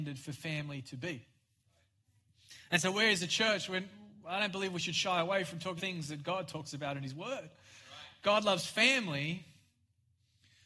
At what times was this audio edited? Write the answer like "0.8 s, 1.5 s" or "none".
5.8 s